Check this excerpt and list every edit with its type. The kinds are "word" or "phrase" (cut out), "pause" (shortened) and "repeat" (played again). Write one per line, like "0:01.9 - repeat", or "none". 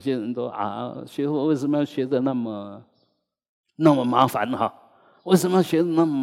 none